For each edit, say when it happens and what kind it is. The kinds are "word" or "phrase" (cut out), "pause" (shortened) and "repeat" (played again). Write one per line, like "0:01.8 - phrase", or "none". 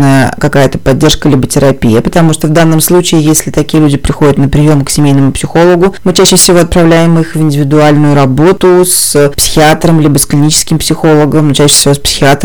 none